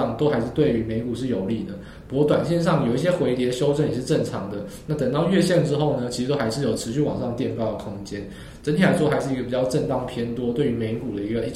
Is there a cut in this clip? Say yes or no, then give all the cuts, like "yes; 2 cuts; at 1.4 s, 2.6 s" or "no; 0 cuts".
no; 0 cuts